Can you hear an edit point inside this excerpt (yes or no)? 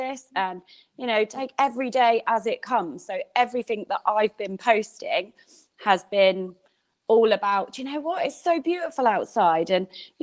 no